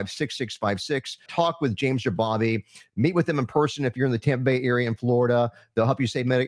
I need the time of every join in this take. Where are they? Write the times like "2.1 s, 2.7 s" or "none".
1.3 s